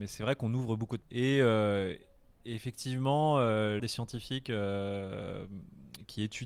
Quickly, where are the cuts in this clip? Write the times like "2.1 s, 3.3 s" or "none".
1.0 s, 3.8 s